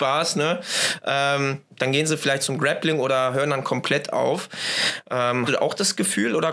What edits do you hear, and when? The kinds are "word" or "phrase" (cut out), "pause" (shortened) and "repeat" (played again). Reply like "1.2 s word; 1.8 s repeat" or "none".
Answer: 5.5 s word